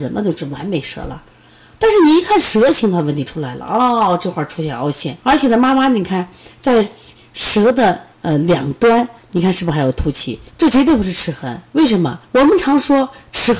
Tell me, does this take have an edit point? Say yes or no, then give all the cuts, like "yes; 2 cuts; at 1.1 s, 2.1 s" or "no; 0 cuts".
yes; 5 cuts; at 5.2 s, 8.1 s, 10.5 s, 11.7 s, 12.2 s